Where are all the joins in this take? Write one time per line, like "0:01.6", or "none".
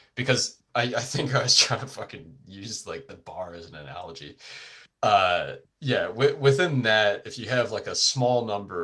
none